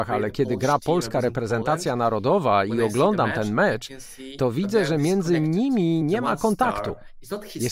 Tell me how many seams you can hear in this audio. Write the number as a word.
zero